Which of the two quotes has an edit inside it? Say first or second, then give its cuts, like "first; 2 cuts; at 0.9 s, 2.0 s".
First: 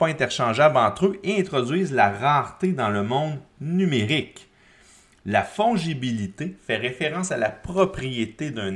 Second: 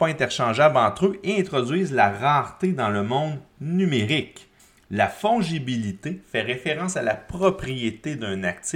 second; 1 cut; at 4.6 s